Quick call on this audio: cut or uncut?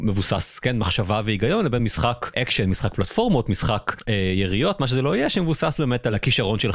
uncut